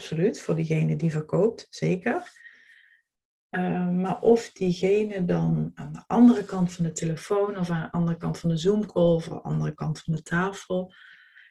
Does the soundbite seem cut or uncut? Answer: uncut